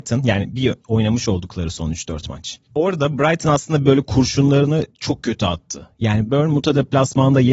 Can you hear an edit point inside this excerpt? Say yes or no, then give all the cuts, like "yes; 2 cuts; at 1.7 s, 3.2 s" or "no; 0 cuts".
yes; 2 cuts; at 2.6 s, 4.9 s